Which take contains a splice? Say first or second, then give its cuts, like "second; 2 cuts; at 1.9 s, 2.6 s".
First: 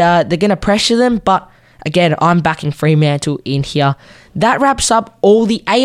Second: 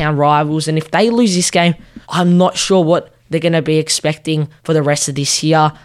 second; 2 cuts; at 2.0 s, 4.6 s